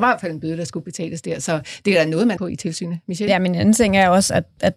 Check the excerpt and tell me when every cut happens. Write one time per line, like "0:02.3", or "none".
0:02.4

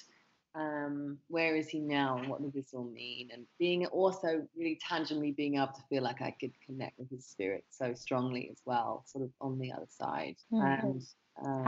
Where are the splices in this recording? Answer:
0:10.4

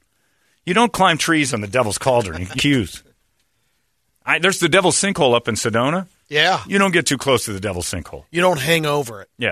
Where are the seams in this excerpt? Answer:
0:02.6

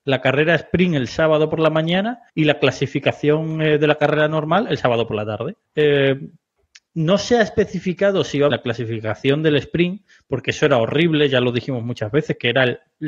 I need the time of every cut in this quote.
0:02.3
0:05.7
0:08.5

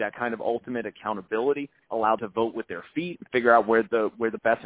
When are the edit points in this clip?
0:02.2

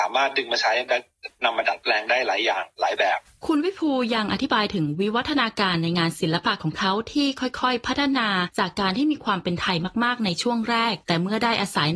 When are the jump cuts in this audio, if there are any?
none

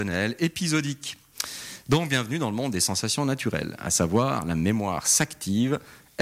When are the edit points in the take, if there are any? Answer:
none

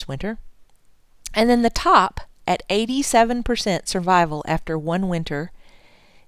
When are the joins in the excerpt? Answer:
none

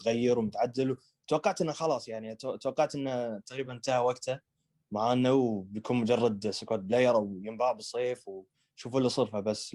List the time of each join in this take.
none

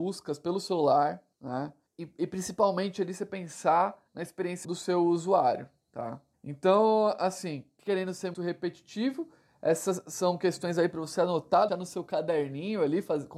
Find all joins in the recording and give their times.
0:04.6
0:08.3
0:11.7

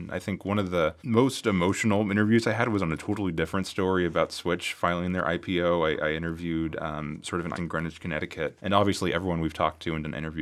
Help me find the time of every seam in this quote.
0:01.0
0:07.5
0:08.6

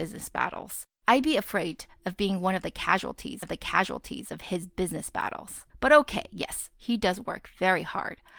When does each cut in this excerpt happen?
0:01.0
0:03.4
0:05.7

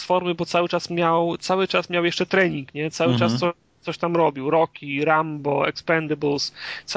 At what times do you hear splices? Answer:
none

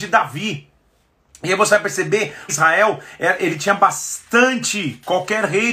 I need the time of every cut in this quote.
0:02.5

